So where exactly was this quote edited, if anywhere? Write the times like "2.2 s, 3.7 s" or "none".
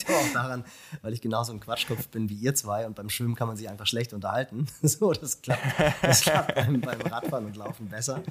none